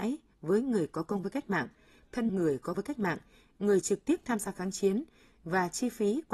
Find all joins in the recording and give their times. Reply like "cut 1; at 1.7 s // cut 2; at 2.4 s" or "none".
cut 1; at 2.3 s // cut 2; at 2.7 s